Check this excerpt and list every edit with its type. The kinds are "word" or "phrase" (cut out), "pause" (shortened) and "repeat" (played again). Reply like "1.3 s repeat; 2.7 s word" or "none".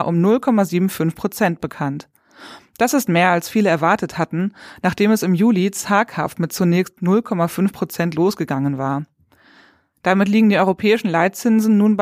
none